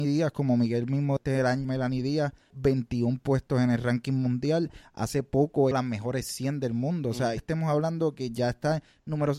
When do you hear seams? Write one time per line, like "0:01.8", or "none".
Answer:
0:01.2
0:01.6
0:02.5
0:05.7
0:07.4